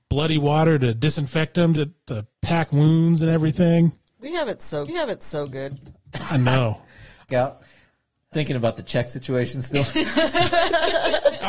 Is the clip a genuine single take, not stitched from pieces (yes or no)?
no